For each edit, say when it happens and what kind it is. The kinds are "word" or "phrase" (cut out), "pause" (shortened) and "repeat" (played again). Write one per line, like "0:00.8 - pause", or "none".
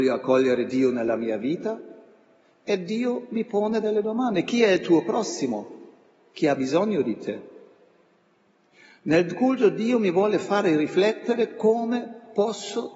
none